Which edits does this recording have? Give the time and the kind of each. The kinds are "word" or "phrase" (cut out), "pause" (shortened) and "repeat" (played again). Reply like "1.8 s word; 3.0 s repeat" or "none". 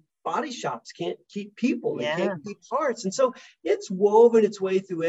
none